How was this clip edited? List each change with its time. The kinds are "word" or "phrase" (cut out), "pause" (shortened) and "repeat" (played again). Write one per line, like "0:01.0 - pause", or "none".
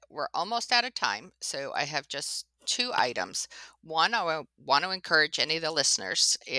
none